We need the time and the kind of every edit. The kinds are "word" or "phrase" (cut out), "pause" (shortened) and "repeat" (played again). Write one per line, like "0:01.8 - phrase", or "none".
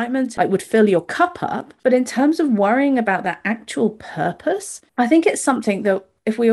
0:01.8 - pause
0:04.9 - pause

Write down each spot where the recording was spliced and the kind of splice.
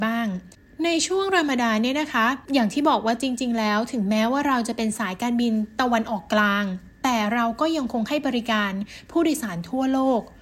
0:02.4 - pause

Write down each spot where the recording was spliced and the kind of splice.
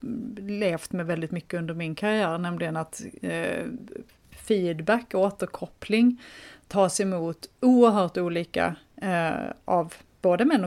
none

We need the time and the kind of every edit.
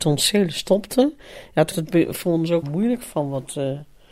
0:01.7 - word
0:02.6 - word

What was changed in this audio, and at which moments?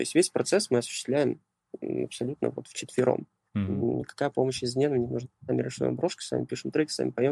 none

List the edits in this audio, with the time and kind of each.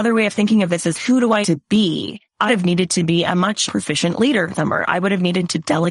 0:00.9 - word
0:01.4 - word
0:02.5 - word
0:03.7 - word
0:04.5 - word

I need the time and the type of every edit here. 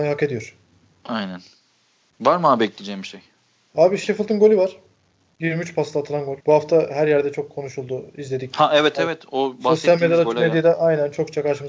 0:06.4 - pause

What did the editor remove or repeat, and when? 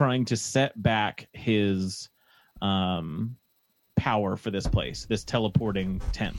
none

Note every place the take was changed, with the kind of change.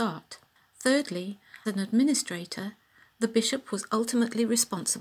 0:01.7 - word

